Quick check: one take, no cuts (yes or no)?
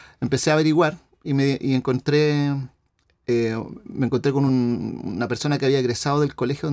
yes